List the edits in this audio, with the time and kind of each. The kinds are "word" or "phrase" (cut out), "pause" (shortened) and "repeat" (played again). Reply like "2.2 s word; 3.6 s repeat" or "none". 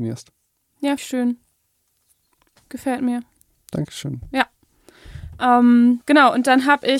1.0 s word; 6.0 s word